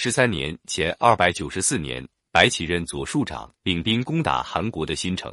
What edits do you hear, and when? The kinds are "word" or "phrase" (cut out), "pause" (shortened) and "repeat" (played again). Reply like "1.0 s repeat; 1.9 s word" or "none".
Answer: 3.6 s pause